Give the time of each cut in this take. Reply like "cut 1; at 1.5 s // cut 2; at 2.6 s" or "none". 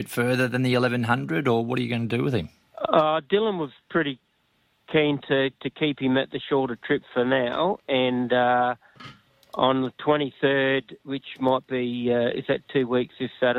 none